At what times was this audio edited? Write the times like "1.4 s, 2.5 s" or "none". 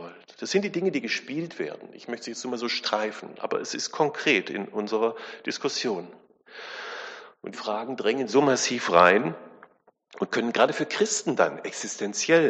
7.5 s